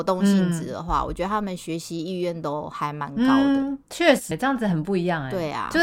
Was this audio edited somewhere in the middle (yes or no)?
yes